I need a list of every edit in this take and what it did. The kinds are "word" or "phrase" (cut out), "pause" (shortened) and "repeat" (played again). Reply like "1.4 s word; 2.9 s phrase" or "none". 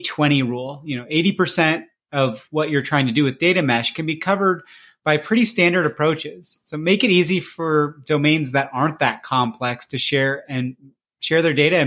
none